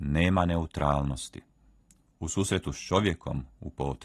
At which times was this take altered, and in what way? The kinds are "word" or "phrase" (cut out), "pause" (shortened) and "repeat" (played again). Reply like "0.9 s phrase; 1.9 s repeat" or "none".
none